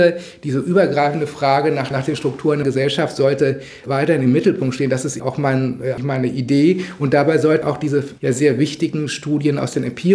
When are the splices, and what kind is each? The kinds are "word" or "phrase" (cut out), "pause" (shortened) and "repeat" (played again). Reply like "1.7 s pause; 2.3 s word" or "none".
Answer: 1.9 s word; 2.6 s word; 5.2 s word; 6.0 s word; 7.6 s word; 8.2 s word